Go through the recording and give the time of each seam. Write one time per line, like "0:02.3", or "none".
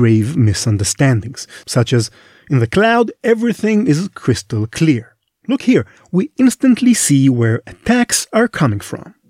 none